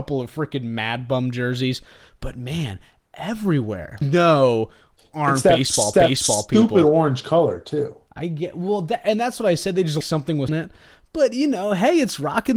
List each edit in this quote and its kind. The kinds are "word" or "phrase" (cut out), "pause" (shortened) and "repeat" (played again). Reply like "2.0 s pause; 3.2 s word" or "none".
4.0 s phrase; 5.9 s repeat; 10.0 s word; 10.5 s phrase